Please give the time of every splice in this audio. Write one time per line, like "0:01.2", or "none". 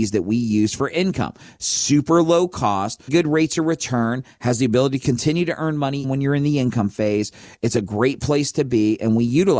0:03.1
0:06.0